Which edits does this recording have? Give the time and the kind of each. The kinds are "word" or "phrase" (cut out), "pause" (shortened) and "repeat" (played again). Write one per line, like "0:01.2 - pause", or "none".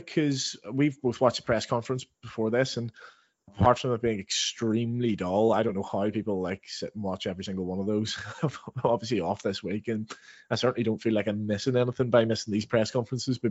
none

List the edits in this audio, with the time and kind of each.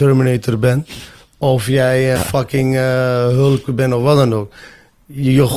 0:02.2 - word

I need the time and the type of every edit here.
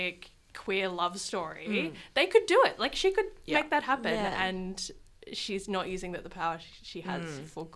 none

